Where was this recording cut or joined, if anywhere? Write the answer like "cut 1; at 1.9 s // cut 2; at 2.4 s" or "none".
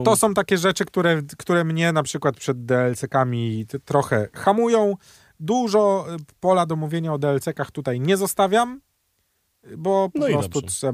none